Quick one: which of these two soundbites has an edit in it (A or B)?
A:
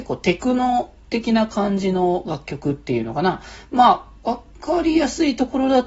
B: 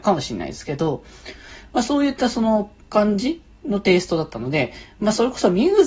B